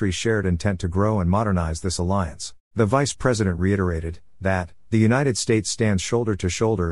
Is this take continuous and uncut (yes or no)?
no